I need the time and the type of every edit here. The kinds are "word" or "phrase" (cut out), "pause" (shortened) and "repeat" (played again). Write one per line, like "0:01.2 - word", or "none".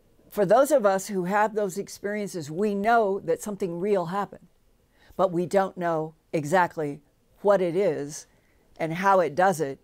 none